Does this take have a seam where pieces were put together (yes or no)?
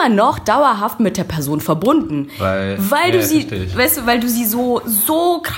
no